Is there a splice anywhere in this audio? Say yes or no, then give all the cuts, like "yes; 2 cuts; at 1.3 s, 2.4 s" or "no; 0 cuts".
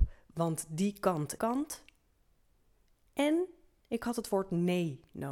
yes; 2 cuts; at 1.4 s, 3.8 s